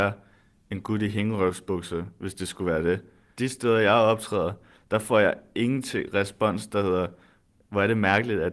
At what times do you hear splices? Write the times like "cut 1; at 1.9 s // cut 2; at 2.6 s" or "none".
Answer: none